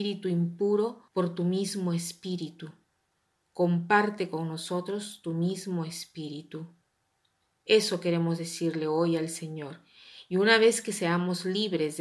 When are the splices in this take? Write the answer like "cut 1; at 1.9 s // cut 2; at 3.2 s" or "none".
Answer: cut 1; at 1.1 s